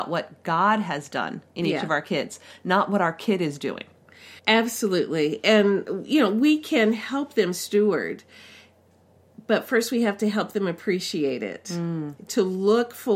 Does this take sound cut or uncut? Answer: cut